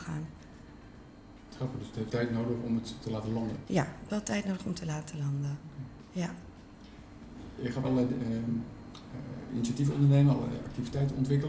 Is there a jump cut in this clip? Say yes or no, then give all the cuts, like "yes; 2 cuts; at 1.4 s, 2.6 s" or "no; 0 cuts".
yes; 3 cuts; at 2.1 s, 4.1 s, 7.8 s